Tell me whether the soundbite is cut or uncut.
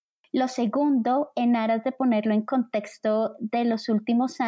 cut